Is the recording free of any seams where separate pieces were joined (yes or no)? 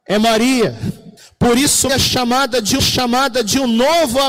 no